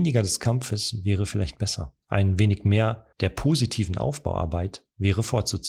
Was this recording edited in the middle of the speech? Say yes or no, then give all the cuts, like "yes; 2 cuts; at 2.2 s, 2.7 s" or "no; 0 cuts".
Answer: yes; 2 cuts; at 2.0 s, 3.1 s